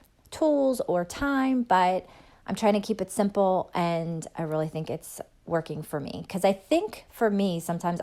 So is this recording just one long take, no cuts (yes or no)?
yes